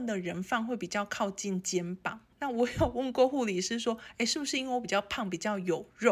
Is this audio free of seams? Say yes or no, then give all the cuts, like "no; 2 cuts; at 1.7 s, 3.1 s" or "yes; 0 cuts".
no; 1 cut; at 2.3 s